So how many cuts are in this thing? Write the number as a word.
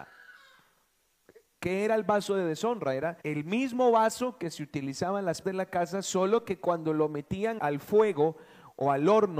three